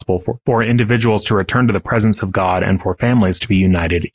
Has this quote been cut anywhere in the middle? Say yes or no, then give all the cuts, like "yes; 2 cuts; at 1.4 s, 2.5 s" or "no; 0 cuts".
no; 0 cuts